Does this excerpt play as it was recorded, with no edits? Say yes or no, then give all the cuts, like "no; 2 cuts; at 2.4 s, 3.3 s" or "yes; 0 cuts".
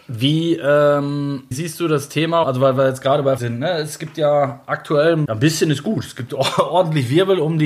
no; 4 cuts; at 1.5 s, 2.4 s, 3.4 s, 5.3 s